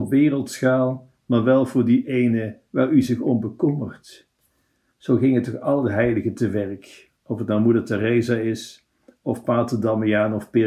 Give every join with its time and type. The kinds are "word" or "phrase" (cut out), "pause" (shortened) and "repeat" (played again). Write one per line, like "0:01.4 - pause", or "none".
none